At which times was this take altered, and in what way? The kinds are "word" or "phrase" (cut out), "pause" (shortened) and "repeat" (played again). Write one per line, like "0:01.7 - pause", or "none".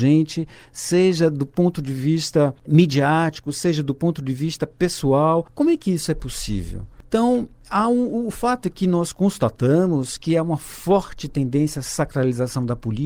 0:02.6 - pause